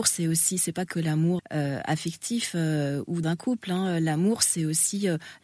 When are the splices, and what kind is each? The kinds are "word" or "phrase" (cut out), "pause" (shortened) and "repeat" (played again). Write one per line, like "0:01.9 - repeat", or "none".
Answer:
0:01.4 - word
0:03.2 - word